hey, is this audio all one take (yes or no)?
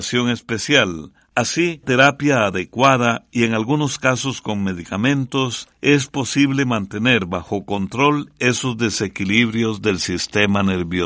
no